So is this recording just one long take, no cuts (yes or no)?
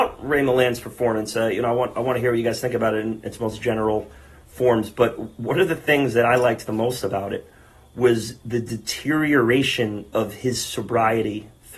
yes